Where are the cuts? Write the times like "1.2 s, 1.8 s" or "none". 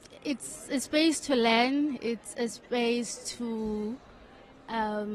none